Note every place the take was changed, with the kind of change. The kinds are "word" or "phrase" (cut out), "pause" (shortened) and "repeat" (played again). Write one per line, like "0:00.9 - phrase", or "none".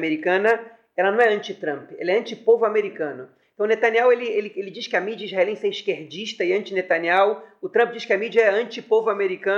none